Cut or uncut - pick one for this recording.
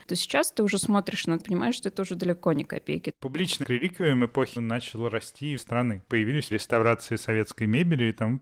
cut